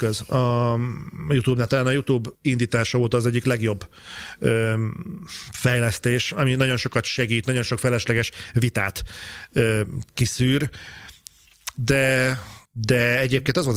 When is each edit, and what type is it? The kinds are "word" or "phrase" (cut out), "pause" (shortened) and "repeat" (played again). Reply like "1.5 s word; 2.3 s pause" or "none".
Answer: 2.3 s pause; 12.6 s pause